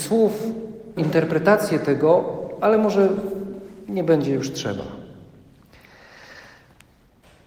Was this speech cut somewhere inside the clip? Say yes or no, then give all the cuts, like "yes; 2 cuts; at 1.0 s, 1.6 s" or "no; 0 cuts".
yes; 1 cut; at 1.0 s